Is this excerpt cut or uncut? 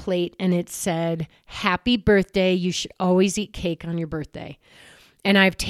uncut